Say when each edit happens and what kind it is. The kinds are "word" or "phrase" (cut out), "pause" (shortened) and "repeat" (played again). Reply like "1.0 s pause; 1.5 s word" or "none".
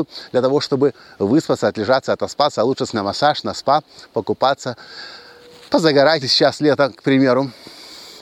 2.9 s word; 6.2 s word